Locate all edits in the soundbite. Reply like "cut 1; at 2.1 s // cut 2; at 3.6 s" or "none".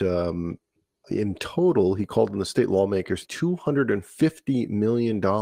cut 1; at 1.0 s // cut 2; at 3.2 s